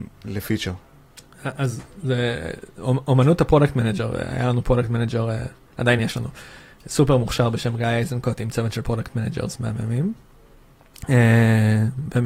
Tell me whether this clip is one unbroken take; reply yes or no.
yes